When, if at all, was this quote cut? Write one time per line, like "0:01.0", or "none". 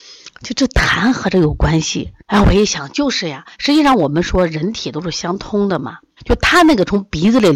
0:02.2
0:03.5
0:06.2